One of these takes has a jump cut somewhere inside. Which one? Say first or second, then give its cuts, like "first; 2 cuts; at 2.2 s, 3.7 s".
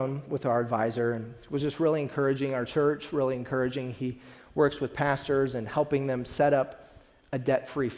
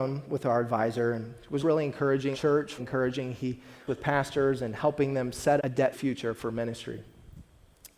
second; 6 cuts; at 1.6 s, 2.3 s, 2.8 s, 3.9 s, 5.6 s, 5.9 s